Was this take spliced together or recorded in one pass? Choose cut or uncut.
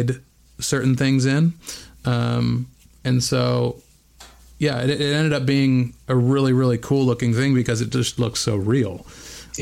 uncut